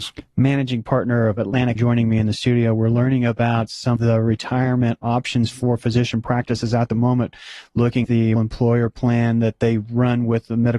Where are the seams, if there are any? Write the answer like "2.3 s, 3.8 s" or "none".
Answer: 1.8 s, 4.0 s, 6.9 s, 8.0 s, 8.4 s